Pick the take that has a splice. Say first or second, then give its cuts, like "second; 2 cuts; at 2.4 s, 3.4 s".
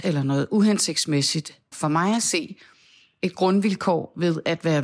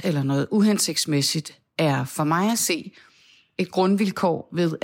first; 1 cut; at 1.7 s